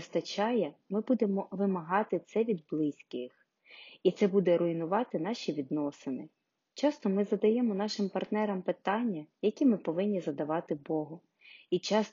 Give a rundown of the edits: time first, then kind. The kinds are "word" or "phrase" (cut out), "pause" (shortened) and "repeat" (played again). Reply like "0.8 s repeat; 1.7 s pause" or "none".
none